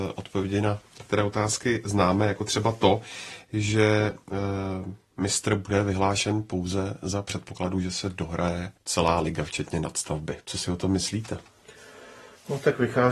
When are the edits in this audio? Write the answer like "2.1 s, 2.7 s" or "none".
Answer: 8.8 s